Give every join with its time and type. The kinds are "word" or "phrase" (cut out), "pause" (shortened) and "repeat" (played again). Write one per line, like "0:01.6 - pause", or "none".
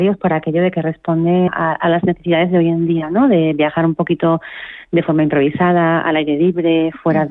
0:01.5 - word